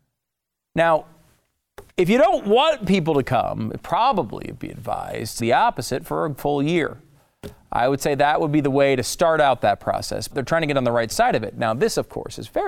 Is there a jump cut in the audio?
yes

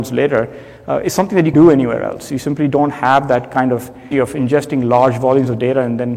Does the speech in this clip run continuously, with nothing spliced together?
no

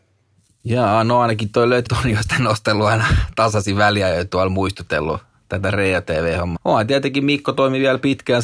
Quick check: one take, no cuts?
no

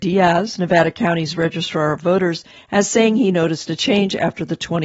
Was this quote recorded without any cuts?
yes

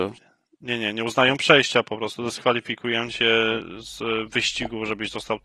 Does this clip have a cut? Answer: no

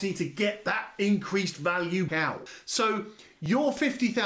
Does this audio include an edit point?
yes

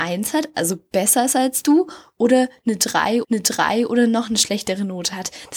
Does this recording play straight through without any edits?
no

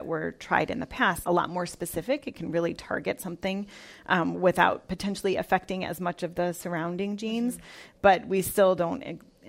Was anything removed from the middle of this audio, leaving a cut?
yes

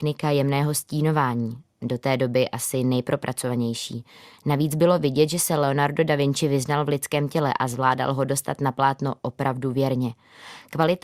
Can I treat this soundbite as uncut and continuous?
yes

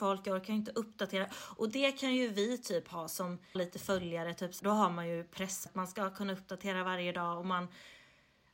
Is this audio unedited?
no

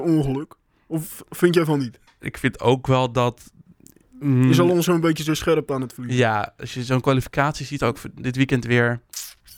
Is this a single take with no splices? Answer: no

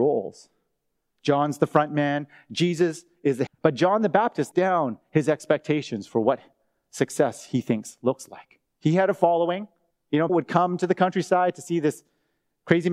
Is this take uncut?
no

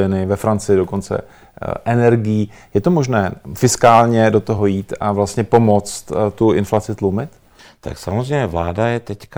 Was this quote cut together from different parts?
no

